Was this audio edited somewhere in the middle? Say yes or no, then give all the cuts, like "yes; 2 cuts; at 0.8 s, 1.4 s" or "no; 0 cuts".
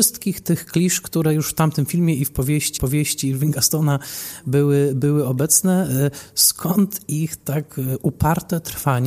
yes; 1 cut; at 2.8 s